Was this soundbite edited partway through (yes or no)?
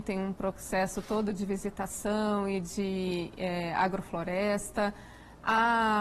no